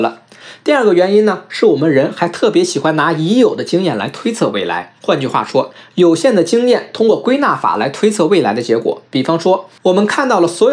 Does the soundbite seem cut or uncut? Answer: cut